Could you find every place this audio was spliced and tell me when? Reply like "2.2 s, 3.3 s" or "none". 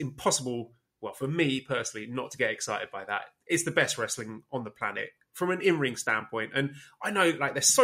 none